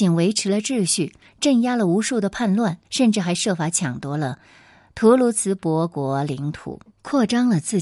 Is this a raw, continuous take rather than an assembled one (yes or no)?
no